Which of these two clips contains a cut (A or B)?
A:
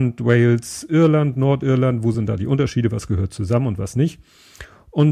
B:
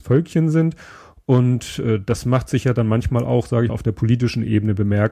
B